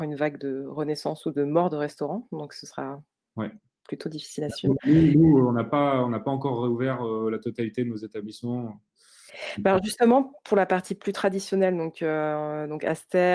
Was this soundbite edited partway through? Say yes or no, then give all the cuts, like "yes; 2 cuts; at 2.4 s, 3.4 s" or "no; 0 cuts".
no; 0 cuts